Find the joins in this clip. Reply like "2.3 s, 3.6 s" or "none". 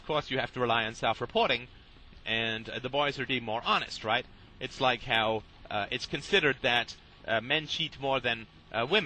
3.3 s